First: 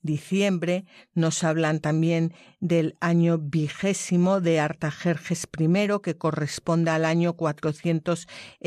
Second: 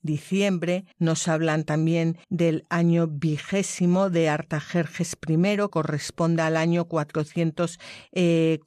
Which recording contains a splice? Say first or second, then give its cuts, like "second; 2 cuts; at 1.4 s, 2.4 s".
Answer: second; 3 cuts; at 0.9 s, 2.2 s, 5.7 s